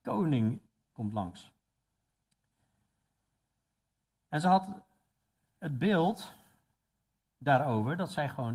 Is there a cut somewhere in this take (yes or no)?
no